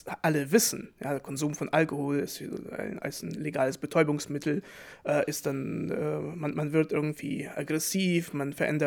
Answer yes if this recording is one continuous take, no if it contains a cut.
yes